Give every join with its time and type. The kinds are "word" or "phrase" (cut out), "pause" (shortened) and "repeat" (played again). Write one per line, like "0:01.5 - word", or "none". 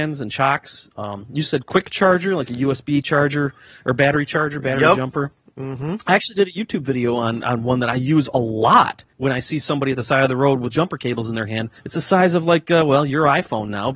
0:09.1 - pause
0:11.8 - pause